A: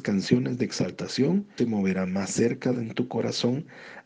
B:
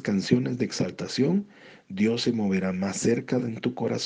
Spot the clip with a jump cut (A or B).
A